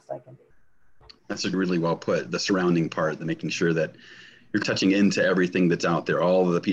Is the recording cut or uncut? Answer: uncut